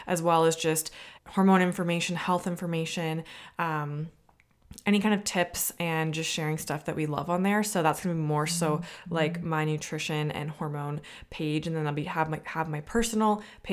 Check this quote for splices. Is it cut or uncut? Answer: cut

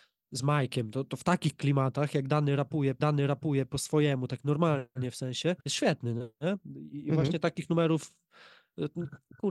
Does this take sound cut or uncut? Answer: cut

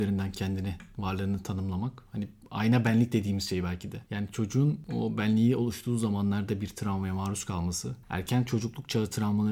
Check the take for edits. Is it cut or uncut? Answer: uncut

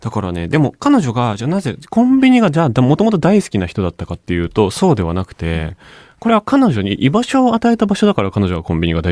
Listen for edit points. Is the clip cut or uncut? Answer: uncut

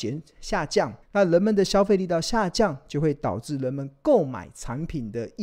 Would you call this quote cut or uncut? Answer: cut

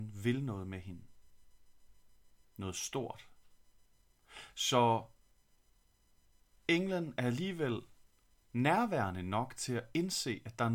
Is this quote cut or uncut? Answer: uncut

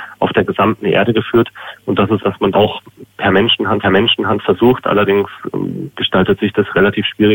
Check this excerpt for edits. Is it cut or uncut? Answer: cut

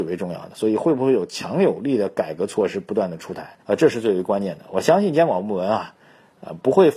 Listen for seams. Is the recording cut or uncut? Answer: cut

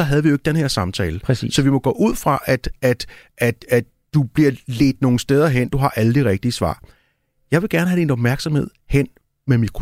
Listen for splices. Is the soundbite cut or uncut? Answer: uncut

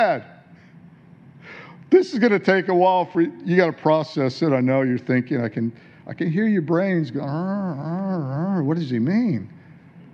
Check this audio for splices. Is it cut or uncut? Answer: uncut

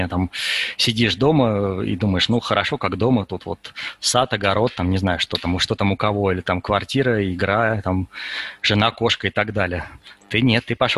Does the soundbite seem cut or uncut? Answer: uncut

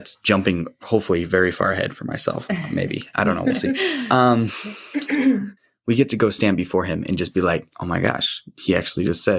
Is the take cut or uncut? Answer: cut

